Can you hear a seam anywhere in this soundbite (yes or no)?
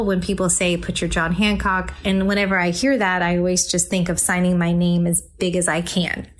no